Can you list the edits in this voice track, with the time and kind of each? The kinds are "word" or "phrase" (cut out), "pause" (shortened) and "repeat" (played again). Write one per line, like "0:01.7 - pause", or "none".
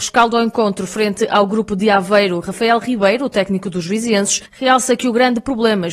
0:04.5 - pause

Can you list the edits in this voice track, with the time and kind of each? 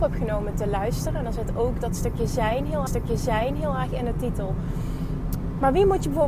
0:02.9 - repeat

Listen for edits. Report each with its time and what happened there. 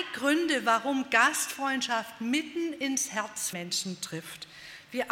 0:03.5 - word

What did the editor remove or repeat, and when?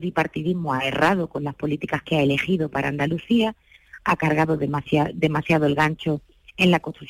none

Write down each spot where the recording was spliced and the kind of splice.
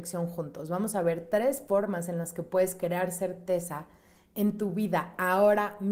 none

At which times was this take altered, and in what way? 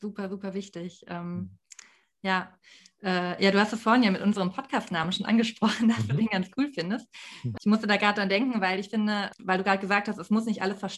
none

